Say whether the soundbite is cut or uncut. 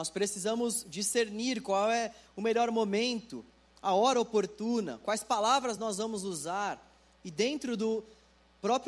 uncut